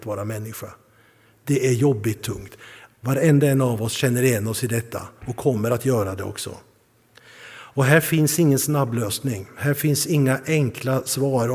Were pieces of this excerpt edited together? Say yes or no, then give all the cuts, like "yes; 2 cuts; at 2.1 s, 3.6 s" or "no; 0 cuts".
yes; 1 cut; at 2.2 s